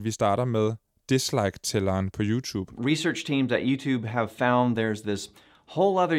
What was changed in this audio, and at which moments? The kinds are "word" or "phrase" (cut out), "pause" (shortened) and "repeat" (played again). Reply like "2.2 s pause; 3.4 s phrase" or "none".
none

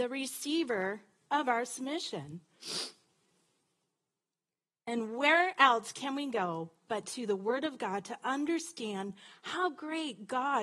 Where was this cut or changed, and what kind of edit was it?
none

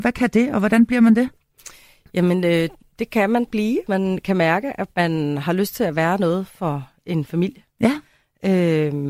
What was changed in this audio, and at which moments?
3.9 s word

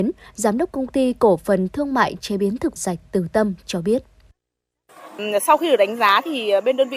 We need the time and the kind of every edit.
2.8 s word

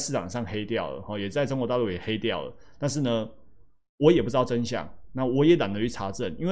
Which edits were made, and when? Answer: none

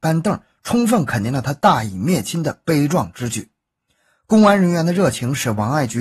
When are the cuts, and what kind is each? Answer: none

